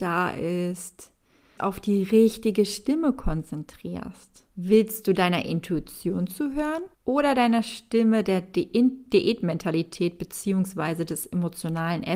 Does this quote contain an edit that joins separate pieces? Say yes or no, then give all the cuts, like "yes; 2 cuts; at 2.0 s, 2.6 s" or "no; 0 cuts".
yes; 3 cuts; at 1.6 s, 4.5 s, 6.9 s